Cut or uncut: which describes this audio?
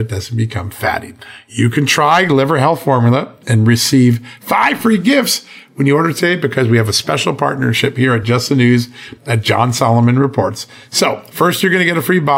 uncut